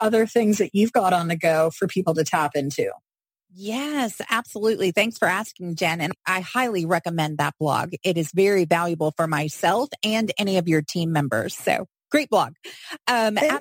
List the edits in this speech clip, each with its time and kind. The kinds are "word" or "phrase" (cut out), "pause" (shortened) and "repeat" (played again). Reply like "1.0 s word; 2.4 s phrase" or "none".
none